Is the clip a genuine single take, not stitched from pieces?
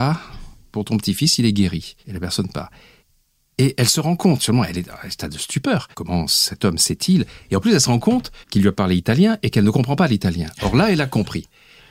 no; 4 cuts; at 2.0 s, 3.0 s, 5.9 s, 8.4 s

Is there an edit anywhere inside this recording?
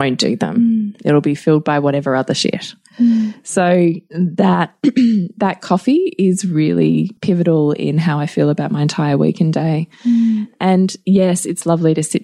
yes; 1 cut; at 7.2 s

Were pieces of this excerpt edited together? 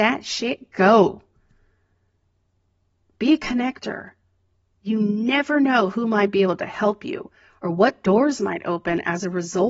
no; 0 cuts

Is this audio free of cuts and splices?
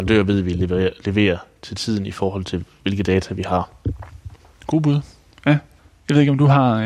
no; 2 cuts; at 4.4 s, 5.8 s

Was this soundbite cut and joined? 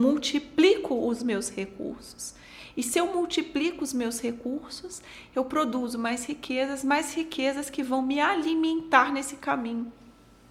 no; 0 cuts

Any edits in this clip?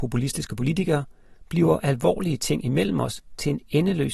no; 0 cuts

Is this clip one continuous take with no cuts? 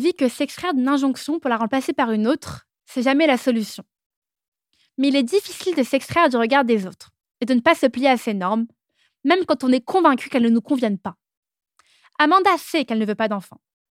yes; 0 cuts

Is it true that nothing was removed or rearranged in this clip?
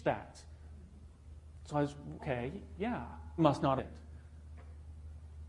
no; 3 cuts; at 2.2 s, 3.4 s, 3.8 s

